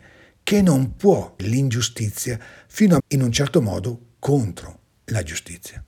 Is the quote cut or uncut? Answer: cut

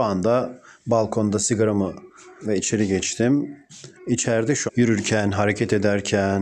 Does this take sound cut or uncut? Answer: cut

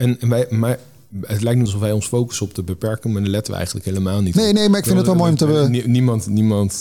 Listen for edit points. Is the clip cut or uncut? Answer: cut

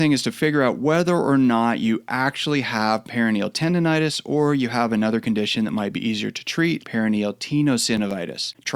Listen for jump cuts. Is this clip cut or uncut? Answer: cut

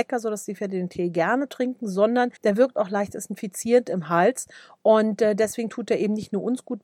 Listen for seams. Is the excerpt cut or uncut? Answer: cut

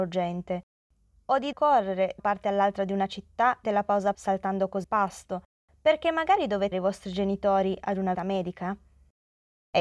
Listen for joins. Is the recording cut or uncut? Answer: cut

